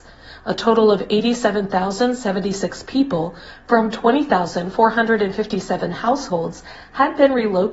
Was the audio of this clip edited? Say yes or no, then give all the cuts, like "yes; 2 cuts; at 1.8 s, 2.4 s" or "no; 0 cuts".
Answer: no; 0 cuts